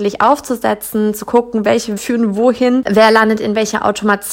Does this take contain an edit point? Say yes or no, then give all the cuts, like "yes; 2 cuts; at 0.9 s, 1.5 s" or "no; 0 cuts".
yes; 2 cuts; at 2.0 s, 2.8 s